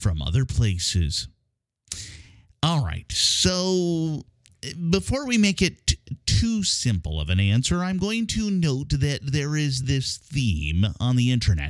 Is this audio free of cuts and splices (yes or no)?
yes